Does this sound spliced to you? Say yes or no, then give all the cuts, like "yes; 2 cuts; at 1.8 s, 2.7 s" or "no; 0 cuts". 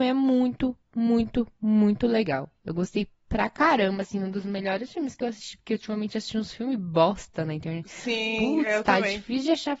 no; 0 cuts